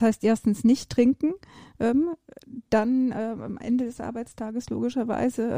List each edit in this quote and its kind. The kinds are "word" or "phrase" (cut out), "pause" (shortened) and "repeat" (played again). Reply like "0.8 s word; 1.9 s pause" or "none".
none